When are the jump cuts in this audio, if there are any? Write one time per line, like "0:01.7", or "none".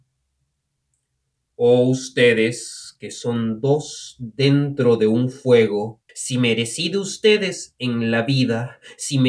0:06.1